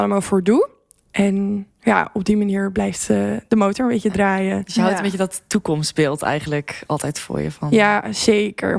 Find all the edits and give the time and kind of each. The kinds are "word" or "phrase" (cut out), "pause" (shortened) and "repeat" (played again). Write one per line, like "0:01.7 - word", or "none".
none

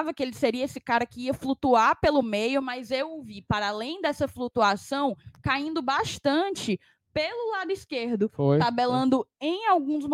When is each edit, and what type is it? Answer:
none

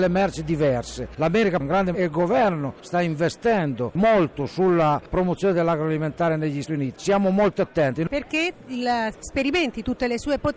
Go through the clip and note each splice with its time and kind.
0:01.9 - phrase
0:06.6 - word
0:06.9 - word
0:09.1 - phrase

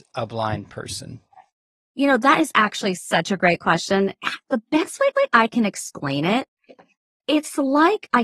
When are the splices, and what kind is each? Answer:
0:05.1 - repeat

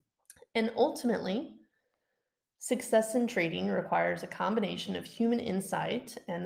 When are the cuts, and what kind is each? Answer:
none

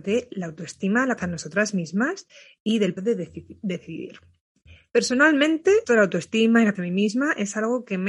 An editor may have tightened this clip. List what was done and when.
0:01.2 - word
0:03.0 - word
0:05.8 - word
0:06.7 - word

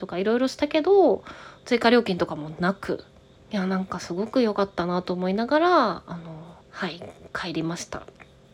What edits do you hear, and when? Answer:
0:03.4 - pause
0:06.6 - pause

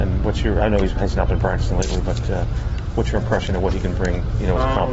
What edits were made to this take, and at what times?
none

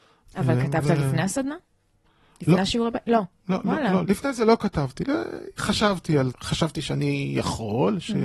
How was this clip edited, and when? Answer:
0:04.0 - word
0:05.6 - word
0:06.3 - word

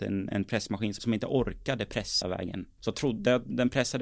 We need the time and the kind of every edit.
0:01.0 - word
0:02.2 - word
0:02.9 - word

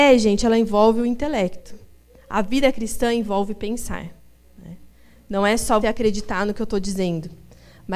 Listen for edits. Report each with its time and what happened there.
0:05.8 - word

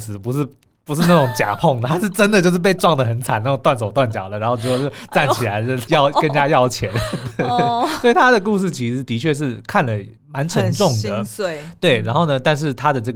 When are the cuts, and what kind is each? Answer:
0:05.9 - word
0:10.2 - pause

